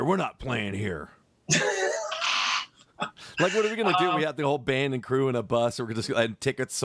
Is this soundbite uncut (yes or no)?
yes